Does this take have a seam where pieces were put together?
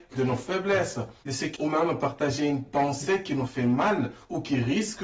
yes; 2 cuts; at 1.2 s, 1.6 s

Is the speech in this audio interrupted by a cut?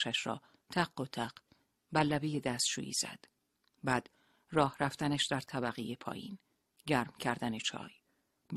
no; 0 cuts

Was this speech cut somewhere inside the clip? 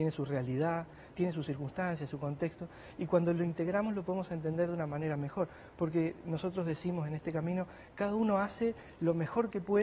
no; 0 cuts

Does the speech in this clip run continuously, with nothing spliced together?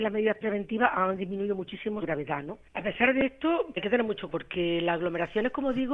no; 4 cuts; at 2.0 s, 2.7 s, 3.8 s, 4.3 s

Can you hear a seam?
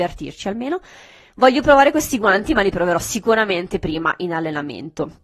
no; 0 cuts

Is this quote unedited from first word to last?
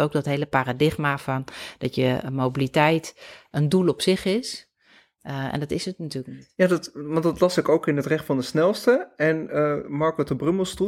yes; 0 cuts

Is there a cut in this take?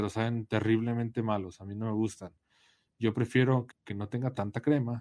yes; 1 cut; at 3.7 s

